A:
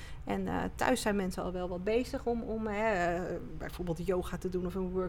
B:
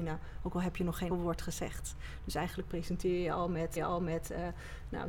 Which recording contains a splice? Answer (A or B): B